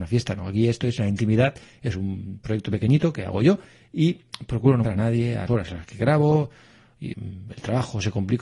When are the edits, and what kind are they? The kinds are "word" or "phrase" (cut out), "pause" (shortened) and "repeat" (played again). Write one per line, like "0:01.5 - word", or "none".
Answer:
0:04.8 - word
0:05.5 - word
0:07.1 - word